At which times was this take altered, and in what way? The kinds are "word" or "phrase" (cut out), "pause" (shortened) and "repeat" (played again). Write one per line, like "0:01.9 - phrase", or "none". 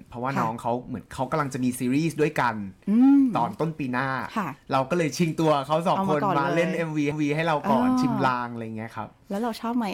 0:07.1 - repeat